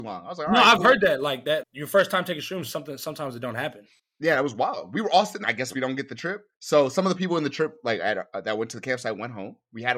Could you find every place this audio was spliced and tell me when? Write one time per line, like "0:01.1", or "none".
0:01.6
0:04.0
0:05.4
0:06.5